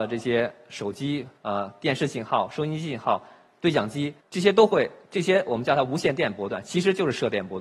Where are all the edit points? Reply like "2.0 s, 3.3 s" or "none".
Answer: 1.4 s, 4.2 s